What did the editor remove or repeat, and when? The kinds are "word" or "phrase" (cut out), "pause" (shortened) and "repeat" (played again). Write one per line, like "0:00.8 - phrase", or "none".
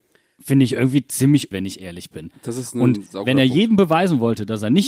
0:01.5 - word